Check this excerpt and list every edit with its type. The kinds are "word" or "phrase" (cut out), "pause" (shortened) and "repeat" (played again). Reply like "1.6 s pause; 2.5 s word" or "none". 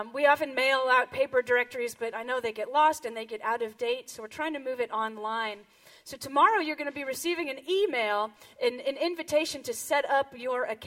none

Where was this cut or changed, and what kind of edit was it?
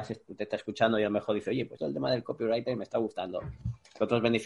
1.8 s word

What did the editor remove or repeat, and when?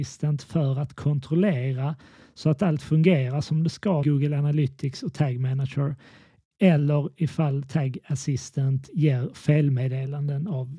4.0 s word

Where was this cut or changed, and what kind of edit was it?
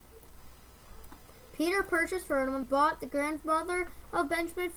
2.2 s word; 2.6 s phrase

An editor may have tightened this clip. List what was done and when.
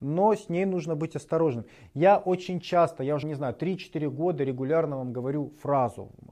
3.2 s word

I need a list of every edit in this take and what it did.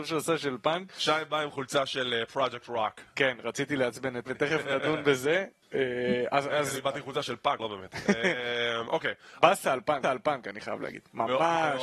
4.3 s word; 5.6 s pause; 7.6 s word; 10.0 s repeat

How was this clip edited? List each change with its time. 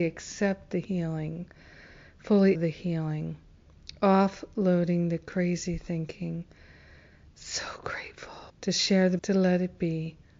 2.5 s word; 8.5 s pause; 9.2 s word

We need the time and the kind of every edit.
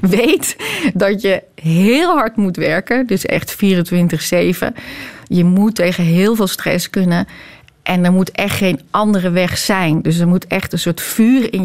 none

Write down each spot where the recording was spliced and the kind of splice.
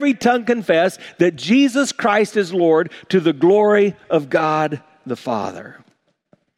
none

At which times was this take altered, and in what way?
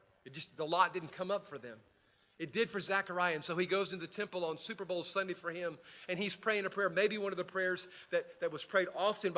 none

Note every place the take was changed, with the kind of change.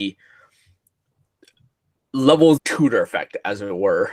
2.6 s word

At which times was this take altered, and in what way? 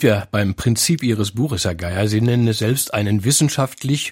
none

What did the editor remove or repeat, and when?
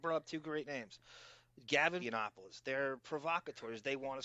2.0 s phrase

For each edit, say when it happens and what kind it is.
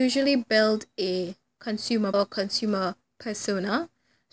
2.1 s word

